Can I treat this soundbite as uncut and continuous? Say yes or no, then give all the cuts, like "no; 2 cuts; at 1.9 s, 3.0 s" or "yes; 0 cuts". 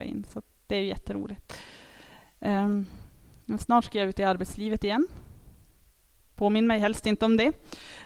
yes; 0 cuts